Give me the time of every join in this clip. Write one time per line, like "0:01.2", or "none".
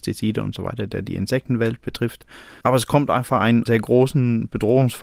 0:02.6